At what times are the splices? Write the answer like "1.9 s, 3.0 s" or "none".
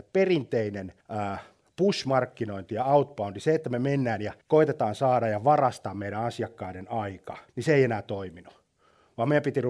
1.0 s, 4.4 s, 7.5 s